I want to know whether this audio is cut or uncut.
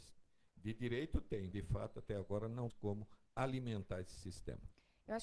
cut